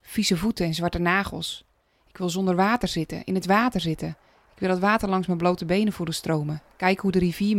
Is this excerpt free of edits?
yes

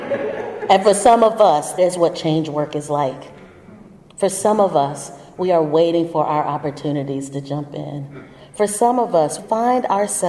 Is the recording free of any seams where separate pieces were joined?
no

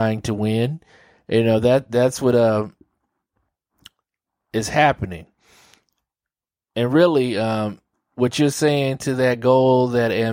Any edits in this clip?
no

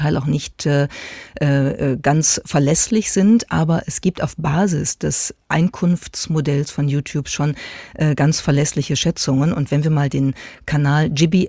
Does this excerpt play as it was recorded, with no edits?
yes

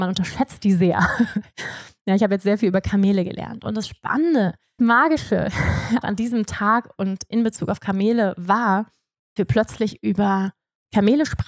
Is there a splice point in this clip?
yes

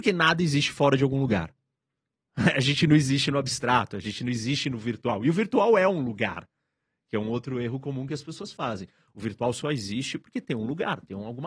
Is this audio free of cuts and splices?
yes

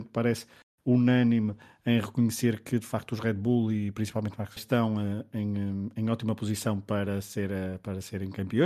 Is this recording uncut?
no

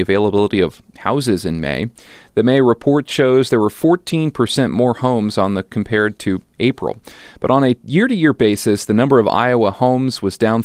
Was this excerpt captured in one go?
yes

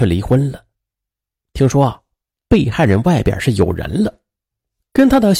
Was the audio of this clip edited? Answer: no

